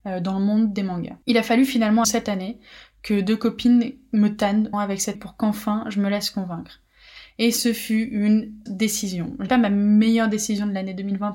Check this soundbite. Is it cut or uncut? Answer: cut